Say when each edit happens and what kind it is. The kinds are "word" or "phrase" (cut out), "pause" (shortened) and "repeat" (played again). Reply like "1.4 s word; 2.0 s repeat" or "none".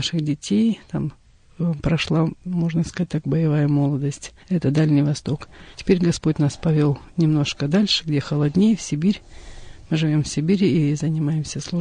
4.4 s pause; 5.7 s pause